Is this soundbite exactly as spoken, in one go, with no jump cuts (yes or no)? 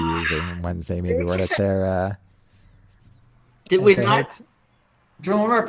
no